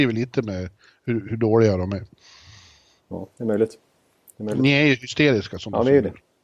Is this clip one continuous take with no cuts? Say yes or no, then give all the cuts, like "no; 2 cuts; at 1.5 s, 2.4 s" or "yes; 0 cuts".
yes; 0 cuts